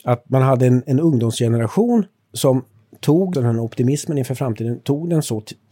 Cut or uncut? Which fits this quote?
cut